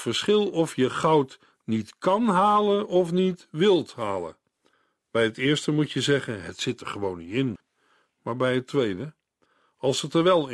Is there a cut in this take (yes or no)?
no